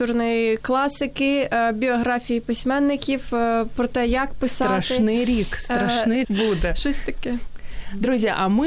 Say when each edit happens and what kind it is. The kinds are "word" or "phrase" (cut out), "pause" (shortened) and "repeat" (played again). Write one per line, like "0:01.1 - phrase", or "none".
0:06.2 - phrase

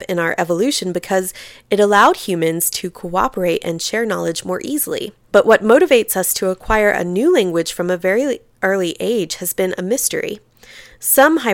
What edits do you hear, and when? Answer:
0:05.2 - pause

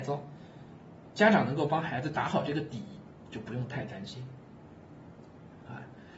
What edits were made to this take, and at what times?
0:01.1 - word

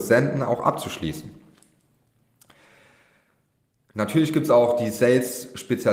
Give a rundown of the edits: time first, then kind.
none

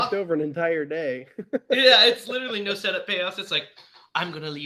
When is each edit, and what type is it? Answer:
none

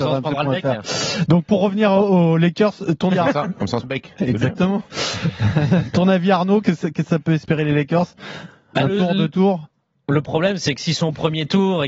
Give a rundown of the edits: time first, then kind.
0:03.1 - word
0:03.8 - word
0:06.6 - word

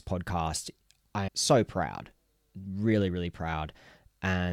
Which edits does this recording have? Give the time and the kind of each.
0:01.3 - word

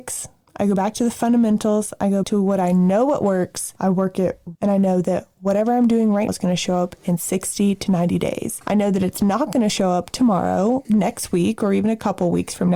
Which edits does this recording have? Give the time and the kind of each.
0:02.2 - word
0:04.5 - phrase
0:06.3 - word
0:10.8 - word

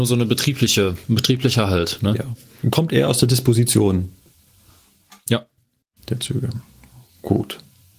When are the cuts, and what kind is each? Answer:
none

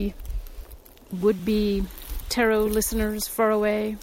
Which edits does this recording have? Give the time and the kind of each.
none

